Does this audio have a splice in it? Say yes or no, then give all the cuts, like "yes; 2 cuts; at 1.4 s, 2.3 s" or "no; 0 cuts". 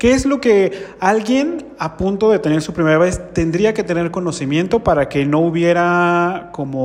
no; 0 cuts